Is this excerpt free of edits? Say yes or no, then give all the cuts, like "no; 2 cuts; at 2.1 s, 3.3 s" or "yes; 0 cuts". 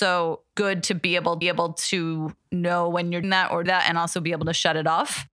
no; 3 cuts; at 1.4 s, 3.2 s, 3.7 s